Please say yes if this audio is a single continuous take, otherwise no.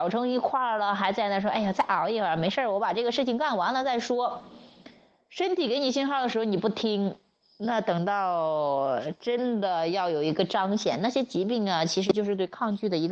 yes